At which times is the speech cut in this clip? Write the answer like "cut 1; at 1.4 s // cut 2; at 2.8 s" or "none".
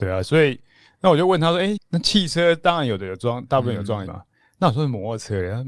cut 1; at 1.8 s // cut 2; at 4.1 s